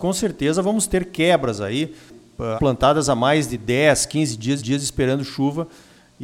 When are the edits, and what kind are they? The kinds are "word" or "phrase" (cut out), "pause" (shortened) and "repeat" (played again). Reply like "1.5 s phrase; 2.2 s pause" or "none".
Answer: 2.6 s word; 4.6 s repeat